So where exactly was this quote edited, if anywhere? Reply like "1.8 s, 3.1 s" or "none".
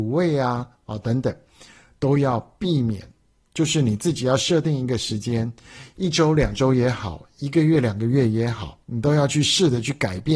8.8 s